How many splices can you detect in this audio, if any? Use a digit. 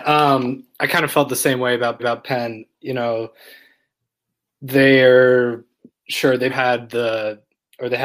2